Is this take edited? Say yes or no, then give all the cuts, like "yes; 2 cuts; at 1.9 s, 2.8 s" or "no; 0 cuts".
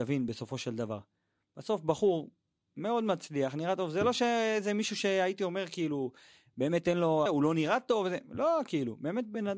yes; 1 cut; at 7.3 s